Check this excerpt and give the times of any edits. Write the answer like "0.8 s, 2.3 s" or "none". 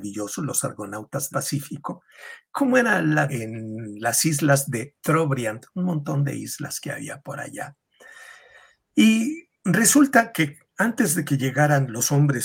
1.3 s, 3.3 s